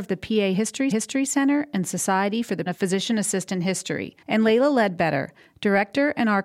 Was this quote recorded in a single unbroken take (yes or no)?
no